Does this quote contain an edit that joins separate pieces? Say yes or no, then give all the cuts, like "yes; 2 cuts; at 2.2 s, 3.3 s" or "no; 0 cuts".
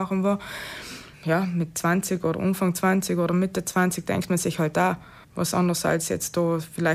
yes; 2 cuts; at 1.1 s, 5.2 s